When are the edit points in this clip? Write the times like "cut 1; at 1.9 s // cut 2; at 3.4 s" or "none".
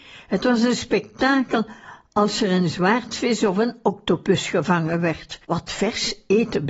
cut 1; at 5.4 s